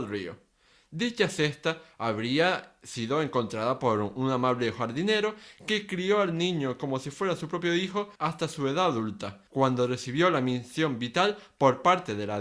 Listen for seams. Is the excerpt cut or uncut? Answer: cut